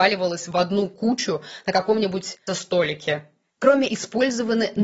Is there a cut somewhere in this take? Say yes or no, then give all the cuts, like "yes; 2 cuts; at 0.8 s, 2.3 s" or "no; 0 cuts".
yes; 2 cuts; at 2.5 s, 3.9 s